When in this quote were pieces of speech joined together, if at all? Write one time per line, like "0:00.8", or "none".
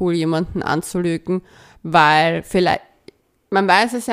none

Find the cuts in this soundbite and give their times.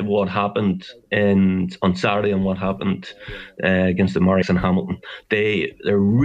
0:04.4

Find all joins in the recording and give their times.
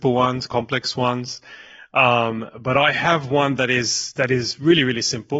none

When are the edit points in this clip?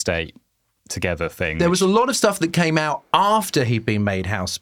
none

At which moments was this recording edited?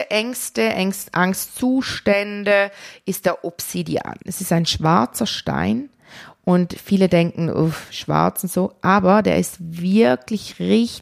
0:04.2

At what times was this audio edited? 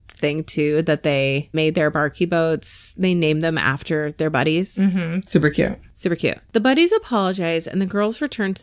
0:01.5

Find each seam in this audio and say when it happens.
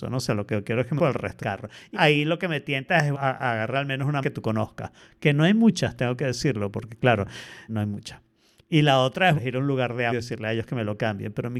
0:01.0
0:01.4
0:01.9
0:03.1
0:04.2
0:07.7
0:09.4
0:10.1

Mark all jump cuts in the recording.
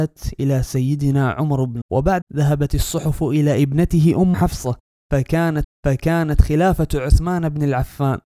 0:01.8
0:02.2
0:04.3
0:05.6

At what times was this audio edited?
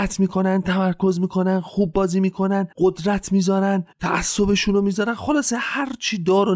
0:02.7
0:03.9

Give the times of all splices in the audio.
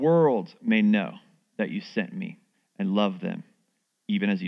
none

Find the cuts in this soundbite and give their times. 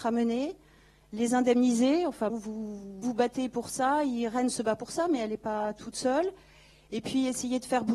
0:02.3
0:03.0

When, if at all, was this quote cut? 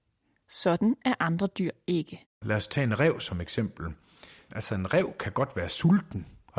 none

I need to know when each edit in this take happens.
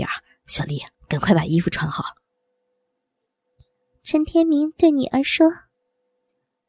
0:00.9

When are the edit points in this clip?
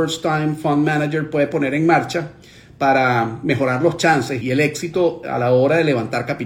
0:04.4

